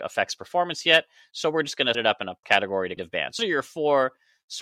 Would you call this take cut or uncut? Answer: cut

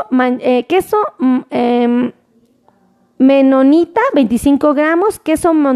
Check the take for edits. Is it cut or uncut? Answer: uncut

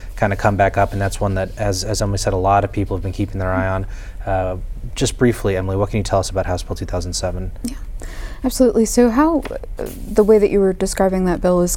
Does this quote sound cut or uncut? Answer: uncut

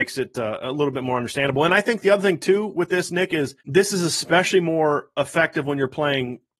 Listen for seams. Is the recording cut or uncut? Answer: cut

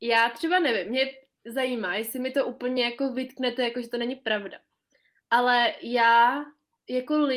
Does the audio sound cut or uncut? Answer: uncut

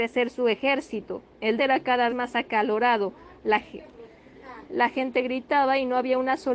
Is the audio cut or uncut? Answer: cut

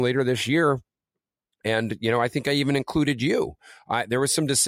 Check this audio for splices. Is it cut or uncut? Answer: uncut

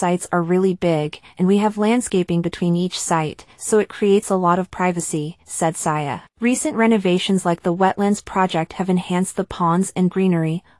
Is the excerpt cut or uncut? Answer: cut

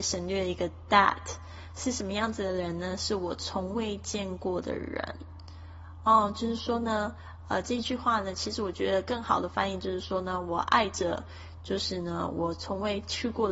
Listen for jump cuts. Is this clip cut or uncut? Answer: uncut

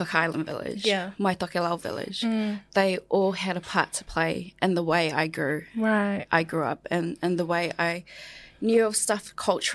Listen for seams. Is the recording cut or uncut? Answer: uncut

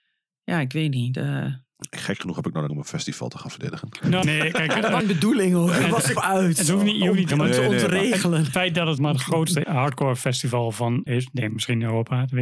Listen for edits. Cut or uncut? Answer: cut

